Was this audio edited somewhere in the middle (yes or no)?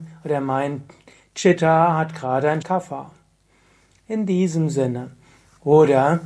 yes